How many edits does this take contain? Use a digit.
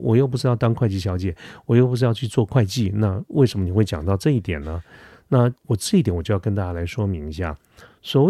1